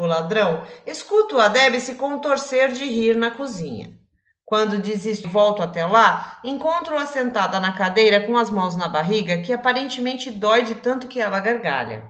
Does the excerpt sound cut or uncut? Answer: cut